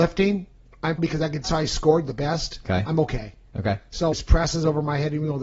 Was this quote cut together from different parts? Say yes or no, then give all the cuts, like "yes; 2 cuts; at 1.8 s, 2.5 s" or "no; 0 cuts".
yes; 3 cuts; at 1.0 s, 1.4 s, 4.1 s